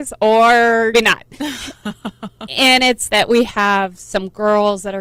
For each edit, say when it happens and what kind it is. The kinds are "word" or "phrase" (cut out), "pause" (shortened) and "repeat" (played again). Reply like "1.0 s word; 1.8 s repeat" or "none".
0.9 s word; 3.1 s phrase